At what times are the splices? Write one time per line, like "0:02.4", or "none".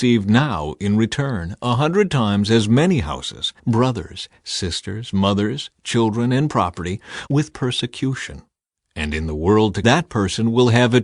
0:03.6
0:07.3
0:09.8